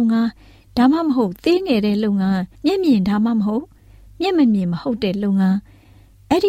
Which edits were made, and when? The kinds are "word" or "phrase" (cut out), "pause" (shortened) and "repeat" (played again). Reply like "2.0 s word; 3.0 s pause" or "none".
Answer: 2.5 s pause